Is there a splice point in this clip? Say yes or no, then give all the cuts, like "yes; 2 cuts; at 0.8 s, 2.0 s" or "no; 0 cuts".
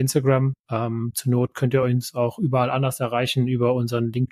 no; 0 cuts